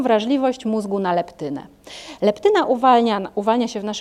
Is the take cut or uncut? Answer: uncut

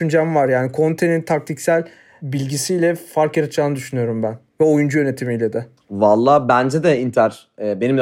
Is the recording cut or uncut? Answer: uncut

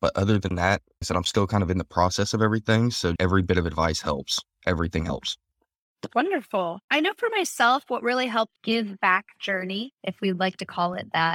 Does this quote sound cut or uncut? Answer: cut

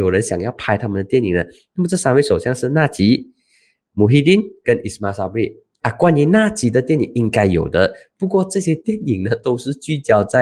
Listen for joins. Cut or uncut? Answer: uncut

